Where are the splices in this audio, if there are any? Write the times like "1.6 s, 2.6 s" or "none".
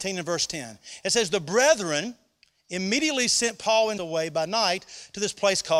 4.0 s